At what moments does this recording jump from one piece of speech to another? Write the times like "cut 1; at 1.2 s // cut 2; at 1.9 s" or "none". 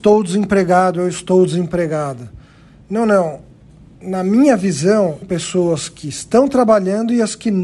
cut 1; at 5.2 s

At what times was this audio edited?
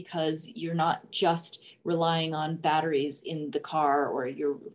none

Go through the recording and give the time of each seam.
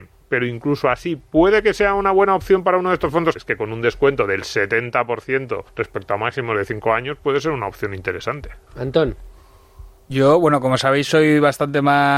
cut 1; at 3.4 s // cut 2; at 5.7 s // cut 3; at 8.7 s

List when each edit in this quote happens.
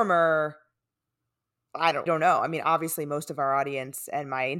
cut 1; at 2.1 s

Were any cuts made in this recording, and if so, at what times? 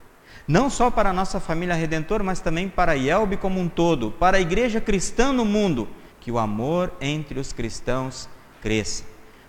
cut 1; at 6.1 s

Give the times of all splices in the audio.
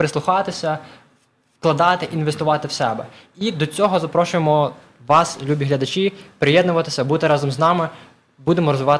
none

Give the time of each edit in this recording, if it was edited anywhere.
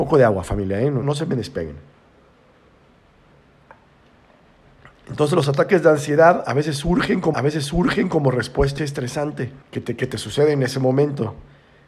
cut 1; at 1.0 s // cut 2; at 7.3 s // cut 3; at 8.8 s // cut 4; at 9.6 s

